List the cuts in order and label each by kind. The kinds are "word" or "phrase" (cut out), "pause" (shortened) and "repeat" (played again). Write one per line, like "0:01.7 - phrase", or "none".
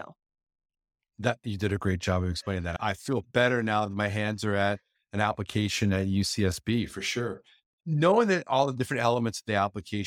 none